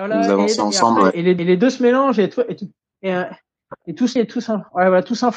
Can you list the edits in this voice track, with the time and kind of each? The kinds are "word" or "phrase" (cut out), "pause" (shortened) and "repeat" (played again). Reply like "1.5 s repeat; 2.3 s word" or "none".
1.4 s repeat; 4.2 s word